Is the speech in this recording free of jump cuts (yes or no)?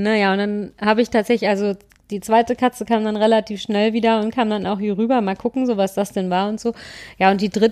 yes